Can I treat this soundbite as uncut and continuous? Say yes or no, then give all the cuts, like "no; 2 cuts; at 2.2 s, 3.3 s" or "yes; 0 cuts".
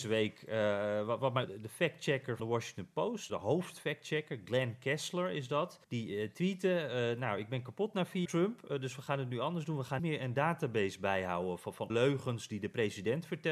no; 7 cuts; at 1.4 s, 2.4 s, 3.3 s, 5.8 s, 8.2 s, 10.0 s, 11.9 s